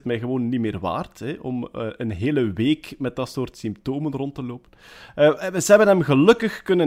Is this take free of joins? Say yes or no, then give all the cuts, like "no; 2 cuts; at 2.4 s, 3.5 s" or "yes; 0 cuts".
yes; 0 cuts